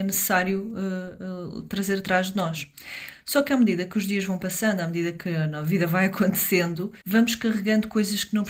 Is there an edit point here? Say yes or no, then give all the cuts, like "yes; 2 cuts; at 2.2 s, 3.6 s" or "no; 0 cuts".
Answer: yes; 1 cut; at 7.0 s